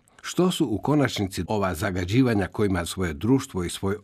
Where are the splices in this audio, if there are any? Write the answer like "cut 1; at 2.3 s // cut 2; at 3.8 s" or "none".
cut 1; at 1.5 s // cut 2; at 2.9 s